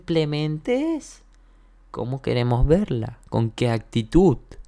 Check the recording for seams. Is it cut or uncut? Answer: uncut